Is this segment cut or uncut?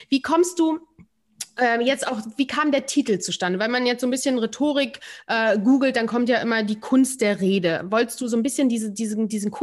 uncut